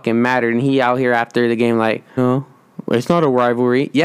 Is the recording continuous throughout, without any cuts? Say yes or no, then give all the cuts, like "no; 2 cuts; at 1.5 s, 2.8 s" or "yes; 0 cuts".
no; 1 cut; at 2.2 s